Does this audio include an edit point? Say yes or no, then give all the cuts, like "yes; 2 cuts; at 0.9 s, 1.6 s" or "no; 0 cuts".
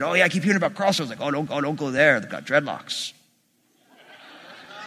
yes; 2 cuts; at 1.5 s, 2.3 s